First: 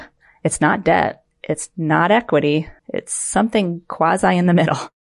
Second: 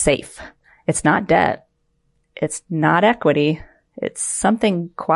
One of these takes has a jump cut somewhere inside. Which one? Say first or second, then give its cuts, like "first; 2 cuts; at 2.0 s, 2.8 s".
first; 2 cuts; at 1.3 s, 2.8 s